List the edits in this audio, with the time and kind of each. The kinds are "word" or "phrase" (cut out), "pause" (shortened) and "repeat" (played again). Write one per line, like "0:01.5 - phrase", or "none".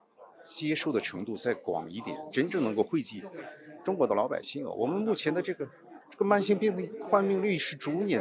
0:06.0 - pause